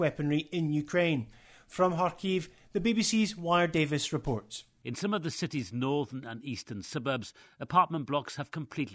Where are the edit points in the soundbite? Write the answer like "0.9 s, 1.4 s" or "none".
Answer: none